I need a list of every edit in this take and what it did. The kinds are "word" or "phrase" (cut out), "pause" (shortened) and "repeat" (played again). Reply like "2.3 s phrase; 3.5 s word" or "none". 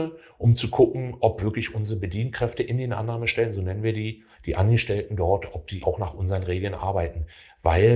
4.3 s pause; 5.8 s word